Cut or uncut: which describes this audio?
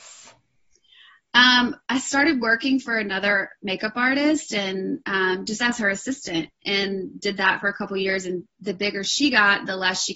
uncut